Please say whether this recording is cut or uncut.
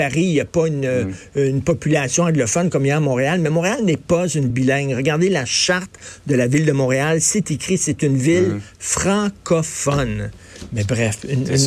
cut